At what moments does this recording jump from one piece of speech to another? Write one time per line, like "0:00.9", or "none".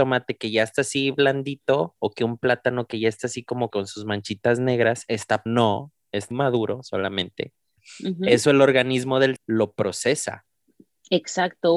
0:03.7
0:05.5
0:06.3
0:09.4